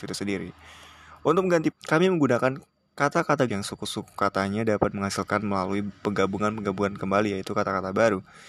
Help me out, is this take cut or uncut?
cut